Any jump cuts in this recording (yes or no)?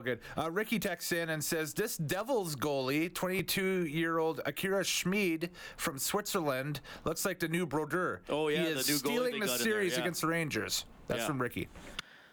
no